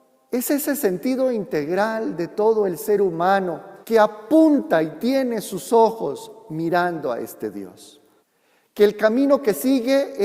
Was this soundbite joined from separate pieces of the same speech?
yes; 2 cuts; at 3.8 s, 8.2 s

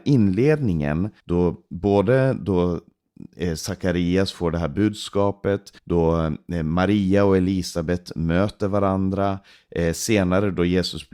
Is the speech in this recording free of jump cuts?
no; 2 cuts; at 1.2 s, 5.8 s

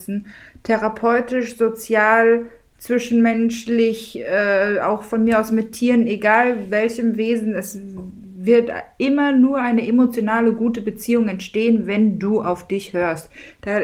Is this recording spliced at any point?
no; 0 cuts

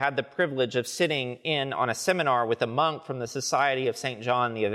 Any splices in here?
no; 0 cuts

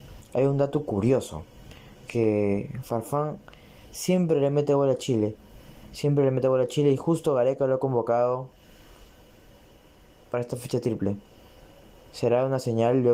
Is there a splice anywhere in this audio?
no; 0 cuts

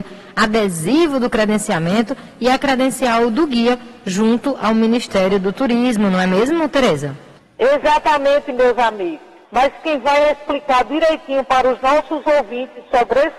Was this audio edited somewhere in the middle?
yes; 2 cuts; at 7.4 s, 9.4 s

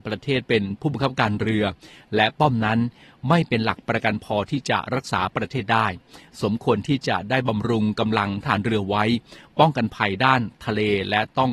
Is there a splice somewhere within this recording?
no; 0 cuts

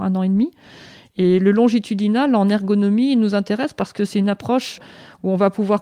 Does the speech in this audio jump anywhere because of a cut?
no; 0 cuts

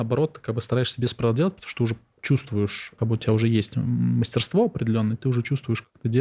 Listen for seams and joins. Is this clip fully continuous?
yes; 0 cuts

